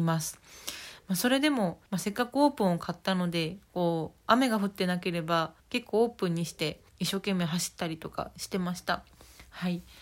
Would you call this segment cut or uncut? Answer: cut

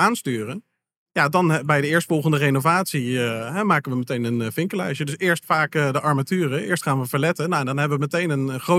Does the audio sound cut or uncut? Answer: uncut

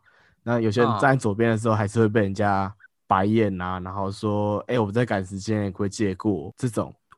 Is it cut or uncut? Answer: cut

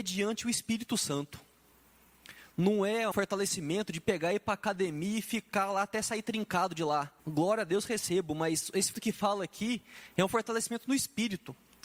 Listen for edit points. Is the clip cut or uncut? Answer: cut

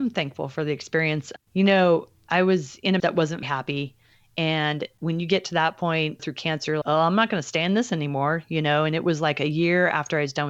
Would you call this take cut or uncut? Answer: cut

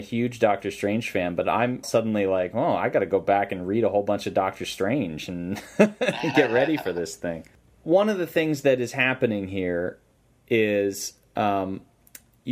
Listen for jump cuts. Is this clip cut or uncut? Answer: cut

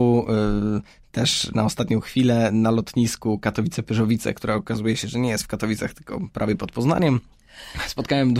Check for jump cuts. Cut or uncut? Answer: cut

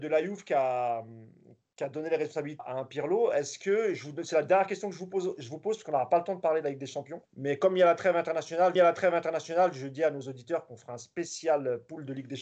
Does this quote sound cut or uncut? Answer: cut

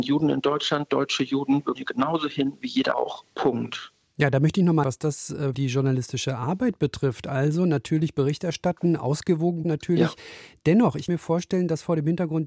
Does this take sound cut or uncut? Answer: cut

